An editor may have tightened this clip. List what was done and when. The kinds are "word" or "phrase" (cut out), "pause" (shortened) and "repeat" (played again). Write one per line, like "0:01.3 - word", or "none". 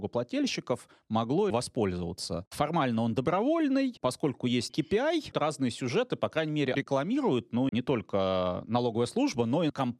0:01.5 - phrase
0:04.0 - word
0:04.7 - word
0:05.3 - phrase
0:06.7 - phrase
0:07.7 - word